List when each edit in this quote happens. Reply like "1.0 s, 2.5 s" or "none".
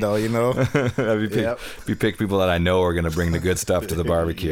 none